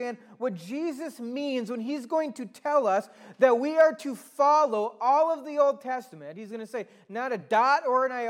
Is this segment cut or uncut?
uncut